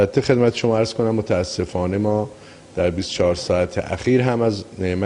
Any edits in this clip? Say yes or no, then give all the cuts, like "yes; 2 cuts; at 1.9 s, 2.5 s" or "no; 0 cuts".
no; 0 cuts